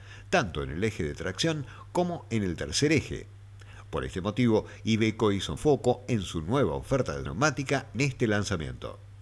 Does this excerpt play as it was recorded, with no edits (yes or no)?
no